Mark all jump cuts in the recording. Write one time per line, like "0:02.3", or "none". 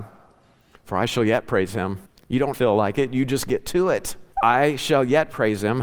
0:02.1
0:02.5
0:04.3